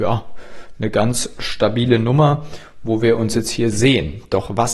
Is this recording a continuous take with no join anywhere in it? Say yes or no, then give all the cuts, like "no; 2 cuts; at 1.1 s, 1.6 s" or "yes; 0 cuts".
yes; 0 cuts